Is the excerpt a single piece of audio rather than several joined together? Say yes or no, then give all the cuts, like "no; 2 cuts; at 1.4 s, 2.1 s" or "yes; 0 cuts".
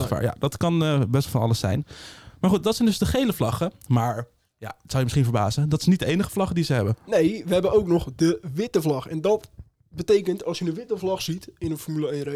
yes; 0 cuts